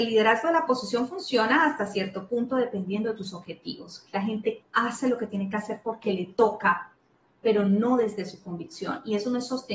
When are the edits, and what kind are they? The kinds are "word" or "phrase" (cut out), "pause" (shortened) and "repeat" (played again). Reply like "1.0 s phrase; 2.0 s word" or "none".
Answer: 4.6 s word